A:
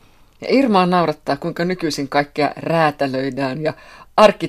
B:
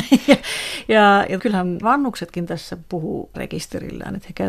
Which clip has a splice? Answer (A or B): B